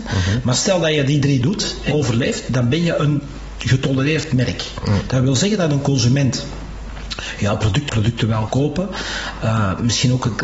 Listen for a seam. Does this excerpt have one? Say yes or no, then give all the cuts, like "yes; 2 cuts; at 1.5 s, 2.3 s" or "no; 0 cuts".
yes; 4 cuts; at 1.4 s, 1.9 s, 7.9 s, 8.5 s